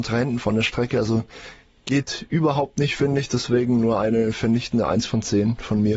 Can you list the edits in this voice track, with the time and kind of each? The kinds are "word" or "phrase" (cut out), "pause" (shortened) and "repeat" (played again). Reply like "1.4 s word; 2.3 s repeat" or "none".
none